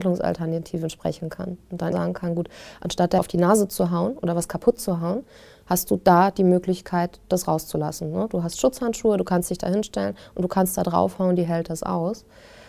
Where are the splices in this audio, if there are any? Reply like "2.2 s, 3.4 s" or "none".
1.9 s, 3.2 s